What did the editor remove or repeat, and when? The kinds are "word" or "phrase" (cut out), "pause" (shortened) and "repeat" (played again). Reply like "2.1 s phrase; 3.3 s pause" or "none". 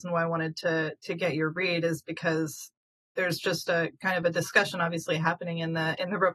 none